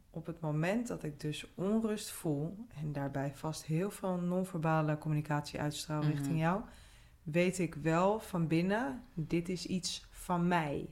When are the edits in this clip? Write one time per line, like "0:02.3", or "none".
none